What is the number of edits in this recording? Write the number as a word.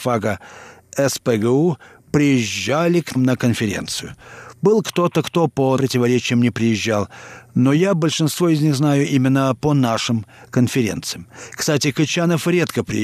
two